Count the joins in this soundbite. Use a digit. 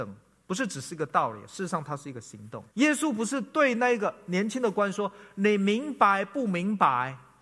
1